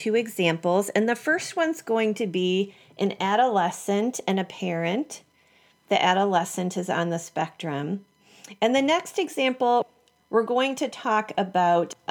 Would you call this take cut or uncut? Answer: uncut